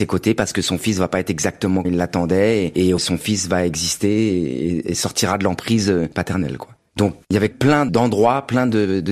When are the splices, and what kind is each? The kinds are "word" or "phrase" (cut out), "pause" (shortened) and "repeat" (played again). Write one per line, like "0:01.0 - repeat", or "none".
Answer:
0:01.8 - word
0:03.0 - word
0:07.5 - word